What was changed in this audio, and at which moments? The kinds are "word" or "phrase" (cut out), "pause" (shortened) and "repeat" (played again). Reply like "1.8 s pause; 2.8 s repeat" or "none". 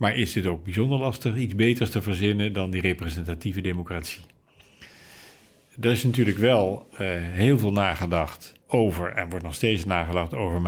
8.6 s pause

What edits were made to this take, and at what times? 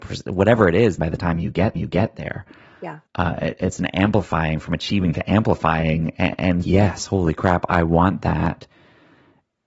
1.0 s phrase; 1.8 s repeat; 3.1 s pause; 6.6 s phrase

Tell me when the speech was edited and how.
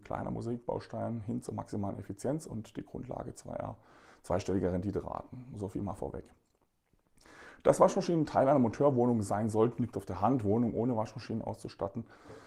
none

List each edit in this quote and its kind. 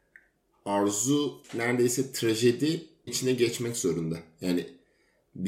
1.4 s word; 3.1 s phrase

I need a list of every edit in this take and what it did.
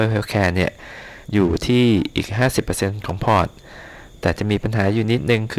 1.2 s pause

